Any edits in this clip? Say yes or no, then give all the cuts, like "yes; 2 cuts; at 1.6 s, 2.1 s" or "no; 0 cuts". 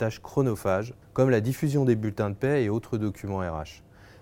yes; 1 cut; at 1.0 s